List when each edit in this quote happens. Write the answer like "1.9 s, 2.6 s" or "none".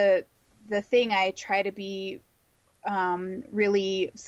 none